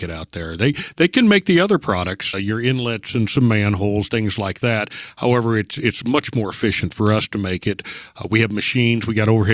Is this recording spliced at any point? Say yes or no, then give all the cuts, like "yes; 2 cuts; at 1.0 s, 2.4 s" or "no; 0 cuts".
yes; 2 cuts; at 2.3 s, 4.1 s